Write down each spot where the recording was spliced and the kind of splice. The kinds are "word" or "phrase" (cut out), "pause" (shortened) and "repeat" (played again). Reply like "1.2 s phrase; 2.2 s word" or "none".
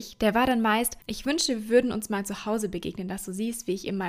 1.0 s pause